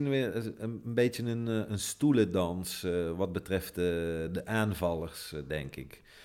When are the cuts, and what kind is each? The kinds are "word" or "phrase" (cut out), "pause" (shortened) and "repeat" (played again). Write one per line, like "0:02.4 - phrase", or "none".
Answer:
none